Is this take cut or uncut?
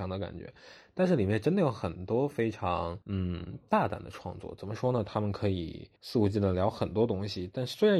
cut